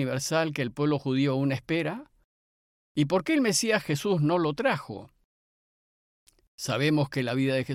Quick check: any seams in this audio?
no; 0 cuts

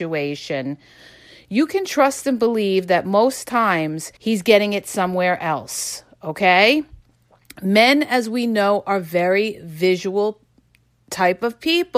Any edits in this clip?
yes; 1 cut; at 4.2 s

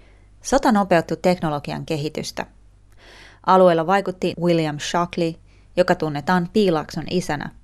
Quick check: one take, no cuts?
no; 1 cut; at 4.3 s

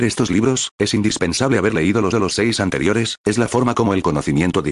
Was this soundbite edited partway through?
yes; 1 cut; at 2.1 s

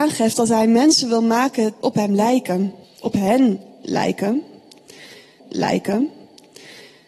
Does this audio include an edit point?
yes; 3 cuts; at 1.8 s, 2.8 s, 5.4 s

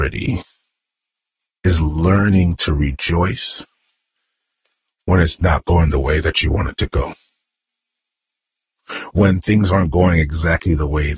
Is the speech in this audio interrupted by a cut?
no; 0 cuts

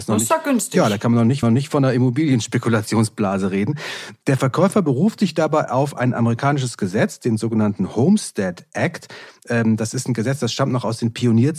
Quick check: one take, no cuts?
no; 1 cut; at 1.4 s

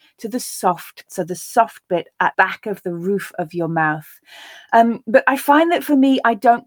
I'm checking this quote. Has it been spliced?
yes; 2 cuts; at 1.1 s, 2.3 s

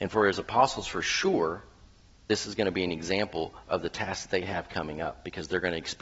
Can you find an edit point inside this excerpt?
no; 0 cuts

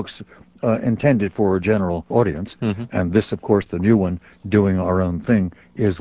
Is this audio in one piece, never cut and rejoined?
no; 1 cut; at 2.1 s

